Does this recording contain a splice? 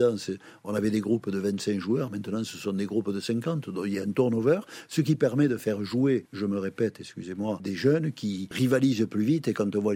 no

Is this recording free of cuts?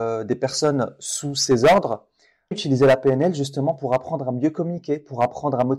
no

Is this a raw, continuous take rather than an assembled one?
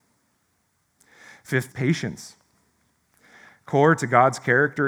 no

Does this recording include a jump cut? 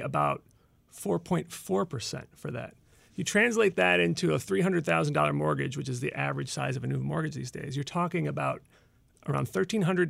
no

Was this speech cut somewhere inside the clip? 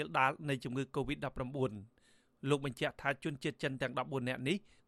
no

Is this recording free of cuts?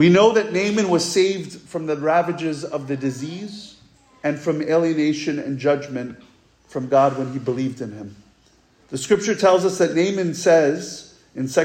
yes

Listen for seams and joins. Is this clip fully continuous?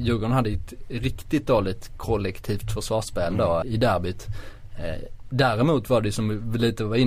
no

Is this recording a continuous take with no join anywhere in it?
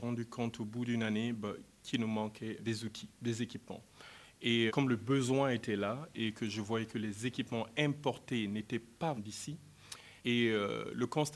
no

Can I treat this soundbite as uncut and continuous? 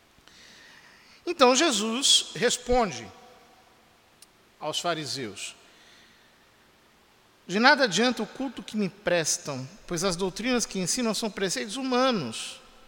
yes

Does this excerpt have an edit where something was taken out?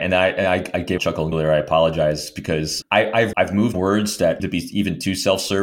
yes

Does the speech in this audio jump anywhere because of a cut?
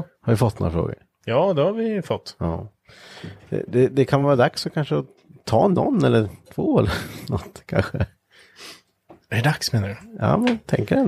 no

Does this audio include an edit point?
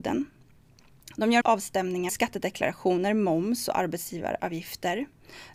yes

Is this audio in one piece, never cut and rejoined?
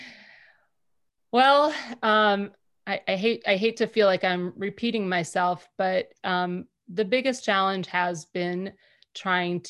yes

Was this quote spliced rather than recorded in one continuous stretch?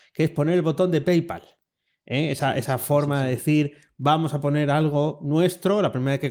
no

